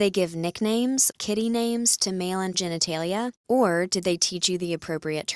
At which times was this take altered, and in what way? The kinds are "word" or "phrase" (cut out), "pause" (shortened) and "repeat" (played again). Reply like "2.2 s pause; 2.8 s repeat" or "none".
1.1 s word; 2.5 s word; 3.4 s pause